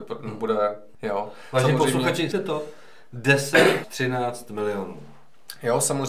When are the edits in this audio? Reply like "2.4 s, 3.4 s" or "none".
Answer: 0.9 s, 2.3 s, 3.8 s